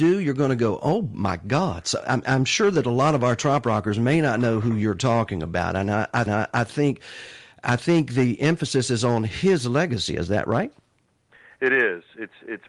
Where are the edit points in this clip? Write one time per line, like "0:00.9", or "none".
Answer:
0:06.3